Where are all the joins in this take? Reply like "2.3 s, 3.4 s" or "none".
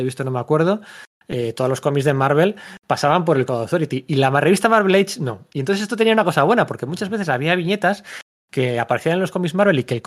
3.5 s